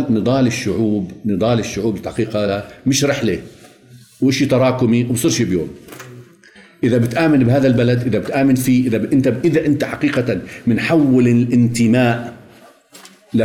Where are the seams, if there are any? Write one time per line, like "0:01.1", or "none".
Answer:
none